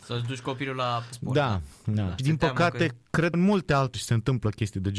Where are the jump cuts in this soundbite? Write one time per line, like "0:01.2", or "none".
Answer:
0:01.1
0:02.2
0:03.3
0:03.9